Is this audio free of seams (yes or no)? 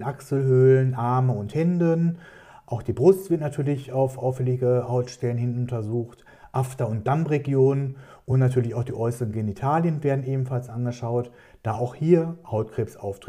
yes